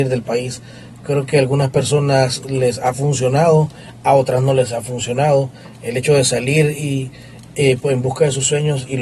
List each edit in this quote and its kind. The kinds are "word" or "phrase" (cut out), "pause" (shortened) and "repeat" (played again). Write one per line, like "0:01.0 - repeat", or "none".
none